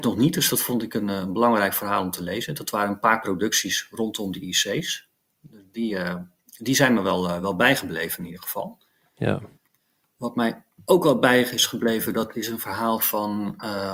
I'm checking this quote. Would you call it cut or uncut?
uncut